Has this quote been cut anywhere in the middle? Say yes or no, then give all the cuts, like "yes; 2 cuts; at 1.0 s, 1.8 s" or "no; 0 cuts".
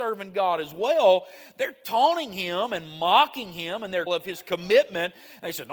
yes; 1 cut; at 4.1 s